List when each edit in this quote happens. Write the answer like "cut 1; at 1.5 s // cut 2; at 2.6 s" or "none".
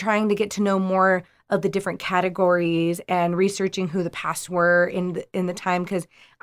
cut 1; at 4.5 s